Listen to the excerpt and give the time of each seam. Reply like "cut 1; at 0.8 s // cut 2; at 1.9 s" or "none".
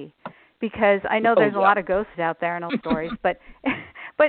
cut 1; at 2.1 s // cut 2; at 2.7 s